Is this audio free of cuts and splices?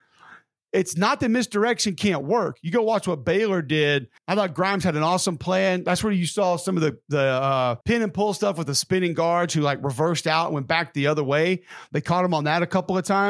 no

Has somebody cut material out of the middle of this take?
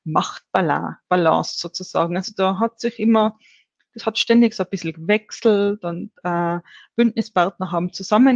no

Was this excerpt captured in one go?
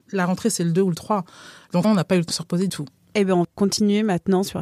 no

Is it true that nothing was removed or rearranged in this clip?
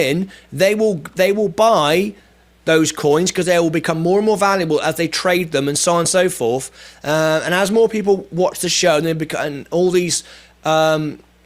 yes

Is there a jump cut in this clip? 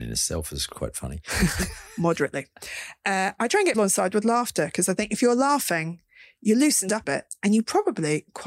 yes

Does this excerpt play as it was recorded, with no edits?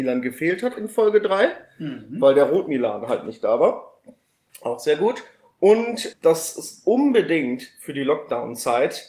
yes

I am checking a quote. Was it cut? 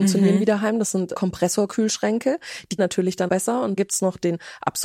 yes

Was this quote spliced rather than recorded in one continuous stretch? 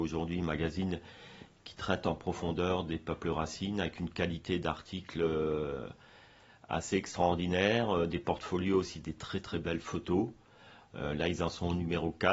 no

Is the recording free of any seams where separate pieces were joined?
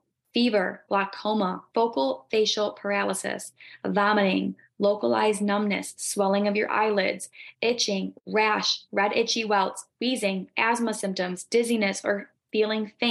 yes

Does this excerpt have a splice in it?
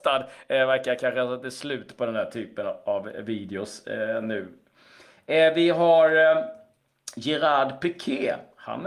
no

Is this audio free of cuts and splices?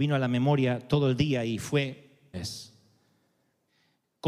no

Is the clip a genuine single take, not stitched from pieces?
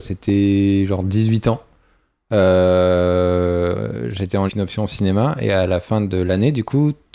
no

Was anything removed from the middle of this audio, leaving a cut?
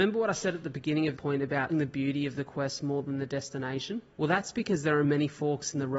yes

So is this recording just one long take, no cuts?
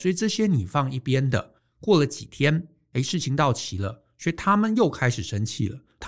yes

